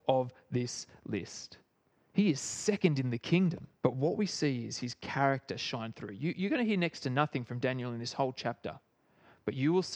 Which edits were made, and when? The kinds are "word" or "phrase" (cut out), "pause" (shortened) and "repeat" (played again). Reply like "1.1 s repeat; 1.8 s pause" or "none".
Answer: 3.8 s pause